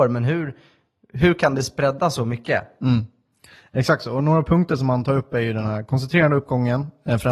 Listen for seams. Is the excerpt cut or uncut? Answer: uncut